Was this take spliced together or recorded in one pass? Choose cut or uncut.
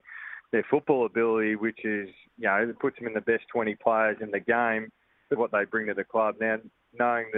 cut